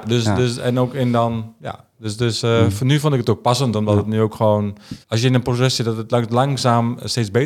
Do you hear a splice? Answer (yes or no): yes